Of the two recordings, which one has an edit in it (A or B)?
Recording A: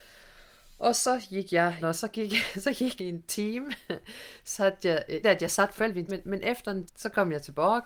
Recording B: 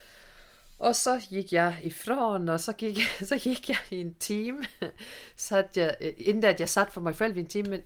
A